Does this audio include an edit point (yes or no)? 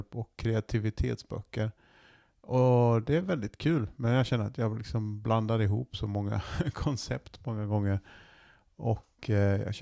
no